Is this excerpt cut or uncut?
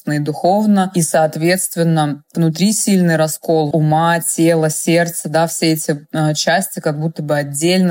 cut